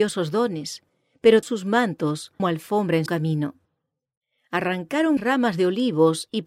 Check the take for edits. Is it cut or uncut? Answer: cut